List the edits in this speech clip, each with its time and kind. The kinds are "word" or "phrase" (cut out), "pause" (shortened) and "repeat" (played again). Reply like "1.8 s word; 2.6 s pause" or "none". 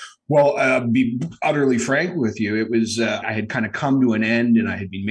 3.2 s word